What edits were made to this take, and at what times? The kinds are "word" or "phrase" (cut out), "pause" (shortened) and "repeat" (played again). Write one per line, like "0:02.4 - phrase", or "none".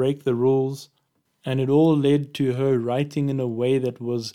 none